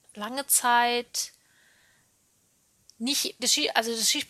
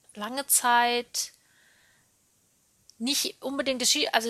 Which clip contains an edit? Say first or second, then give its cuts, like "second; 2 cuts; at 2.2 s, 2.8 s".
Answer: first; 1 cut; at 3.4 s